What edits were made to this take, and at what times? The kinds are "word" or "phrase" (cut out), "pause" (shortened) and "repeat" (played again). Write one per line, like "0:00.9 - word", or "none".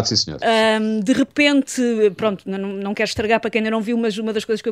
none